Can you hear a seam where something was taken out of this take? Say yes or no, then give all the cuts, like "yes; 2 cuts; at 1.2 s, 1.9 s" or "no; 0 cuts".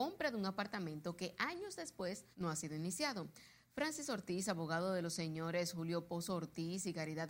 yes; 1 cut; at 2.3 s